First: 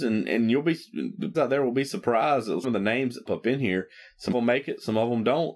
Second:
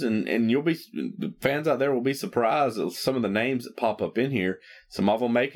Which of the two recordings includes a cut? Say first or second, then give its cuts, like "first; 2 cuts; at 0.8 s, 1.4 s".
first; 4 cuts; at 1.3 s, 2.6 s, 3.3 s, 4.3 s